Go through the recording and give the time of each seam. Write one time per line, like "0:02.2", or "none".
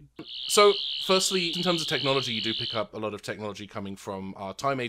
0:01.5